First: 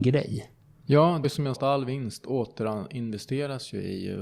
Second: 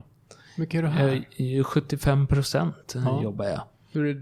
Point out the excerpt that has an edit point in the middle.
first; 2 cuts; at 1.2 s, 1.5 s

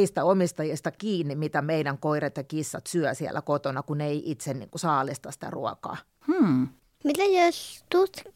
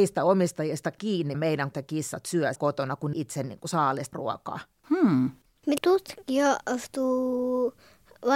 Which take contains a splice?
second; 6 cuts; at 1.3 s, 1.7 s, 2.6 s, 3.1 s, 4.1 s, 5.8 s

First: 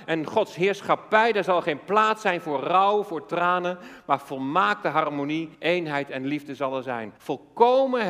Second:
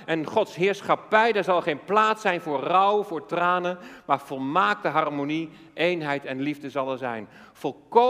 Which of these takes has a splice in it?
first; 2 cuts; at 5.5 s, 7.2 s

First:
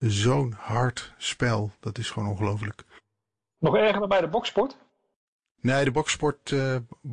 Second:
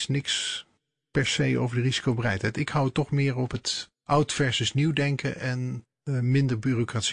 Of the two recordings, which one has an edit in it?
second; 2 cuts; at 3.9 s, 5.9 s

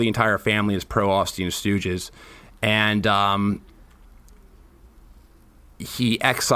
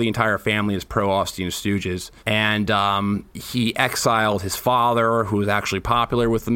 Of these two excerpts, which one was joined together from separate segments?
second; 2 cuts; at 2.2 s, 3.3 s

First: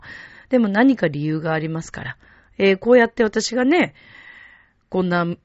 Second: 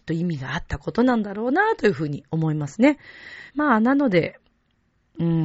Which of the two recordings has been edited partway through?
second; 1 cut; at 3.5 s

